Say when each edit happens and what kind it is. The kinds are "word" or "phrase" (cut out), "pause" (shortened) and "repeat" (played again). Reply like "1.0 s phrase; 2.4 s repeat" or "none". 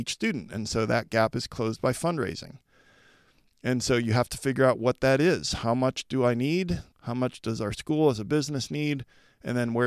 6.9 s pause